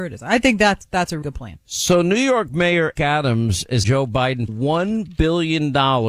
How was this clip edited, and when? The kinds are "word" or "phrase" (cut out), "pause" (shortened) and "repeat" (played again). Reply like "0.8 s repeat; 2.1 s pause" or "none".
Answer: 1.2 s word; 3.0 s word; 3.8 s word; 4.5 s word